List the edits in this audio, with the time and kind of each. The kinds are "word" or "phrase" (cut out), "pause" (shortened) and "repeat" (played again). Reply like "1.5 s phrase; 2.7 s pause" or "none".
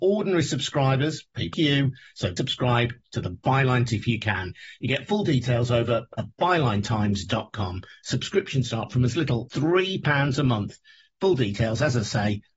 1.5 s word; 2.4 s word; 3.9 s word; 9.5 s word